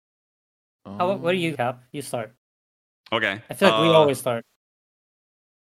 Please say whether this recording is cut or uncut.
cut